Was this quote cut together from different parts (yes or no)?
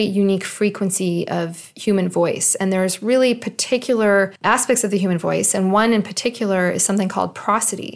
no